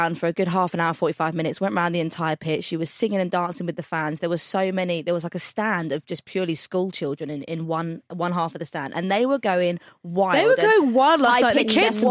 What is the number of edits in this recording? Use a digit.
0